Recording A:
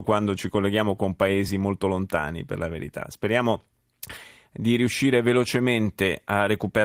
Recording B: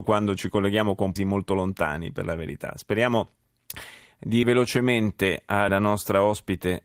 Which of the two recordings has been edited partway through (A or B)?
B